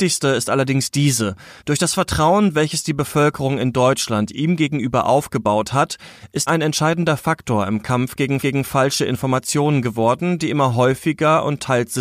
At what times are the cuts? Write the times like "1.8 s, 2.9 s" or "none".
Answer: 1.6 s, 6.5 s, 8.4 s